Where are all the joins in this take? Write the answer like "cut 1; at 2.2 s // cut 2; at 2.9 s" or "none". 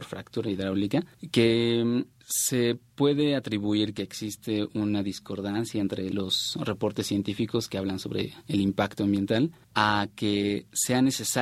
none